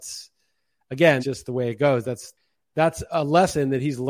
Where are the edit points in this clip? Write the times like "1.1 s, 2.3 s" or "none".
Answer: 1.2 s, 3.1 s

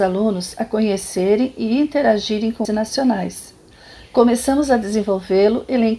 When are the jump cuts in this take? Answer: 2.6 s

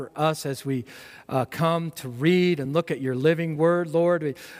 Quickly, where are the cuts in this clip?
none

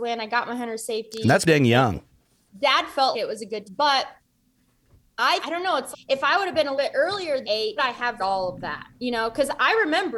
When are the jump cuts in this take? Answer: 1.4 s, 3.1 s, 3.6 s, 5.4 s, 5.9 s, 6.8 s, 7.4 s, 7.8 s, 8.2 s

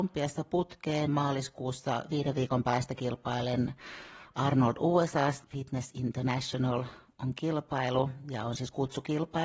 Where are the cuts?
1.1 s, 5.4 s

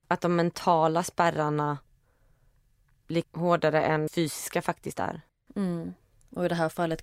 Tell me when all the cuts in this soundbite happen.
3.2 s, 4.1 s, 5.3 s

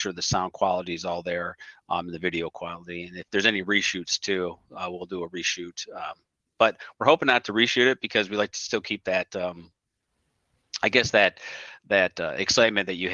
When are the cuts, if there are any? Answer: none

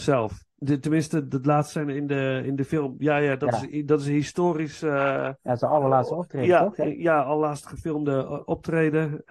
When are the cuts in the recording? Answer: 5.4 s

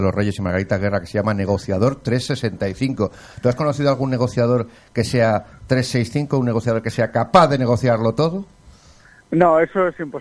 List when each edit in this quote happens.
none

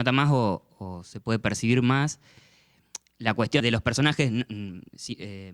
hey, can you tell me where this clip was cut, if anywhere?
3.6 s

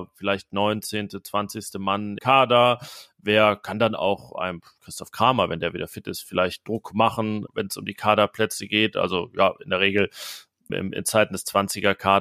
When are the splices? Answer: 2.2 s, 7.5 s, 10.7 s

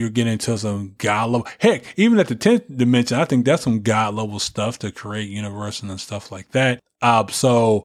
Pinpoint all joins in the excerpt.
none

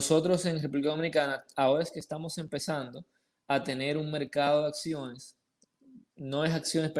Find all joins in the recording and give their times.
none

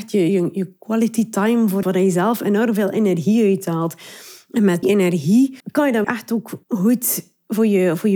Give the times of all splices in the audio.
1.8 s, 4.8 s, 5.6 s, 6.0 s, 6.6 s

